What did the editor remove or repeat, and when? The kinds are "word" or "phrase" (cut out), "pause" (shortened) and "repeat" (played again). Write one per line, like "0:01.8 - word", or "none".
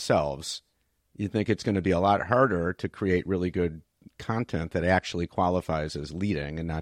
none